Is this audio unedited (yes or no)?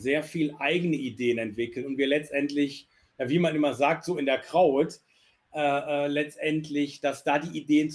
yes